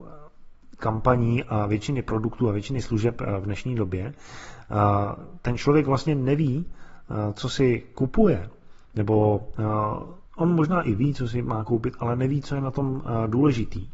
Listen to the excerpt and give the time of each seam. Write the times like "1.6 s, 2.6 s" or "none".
10.3 s